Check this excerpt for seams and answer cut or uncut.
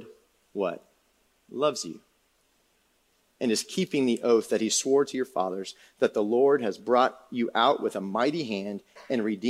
uncut